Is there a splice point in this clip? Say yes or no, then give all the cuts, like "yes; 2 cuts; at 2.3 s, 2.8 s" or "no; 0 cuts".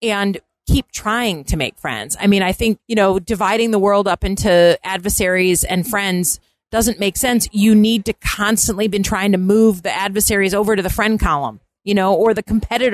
no; 0 cuts